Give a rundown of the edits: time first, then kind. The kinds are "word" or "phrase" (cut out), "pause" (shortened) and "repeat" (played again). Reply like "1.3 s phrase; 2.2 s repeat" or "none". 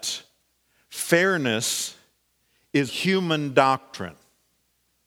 2.9 s word